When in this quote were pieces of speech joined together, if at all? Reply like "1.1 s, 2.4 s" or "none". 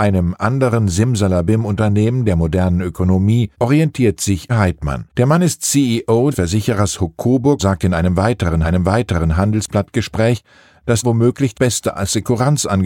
3.5 s, 4.5 s, 5.1 s, 6.3 s, 7.6 s, 8.6 s, 11.0 s, 11.5 s